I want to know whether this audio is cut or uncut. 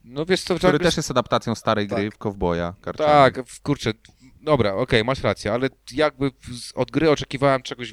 uncut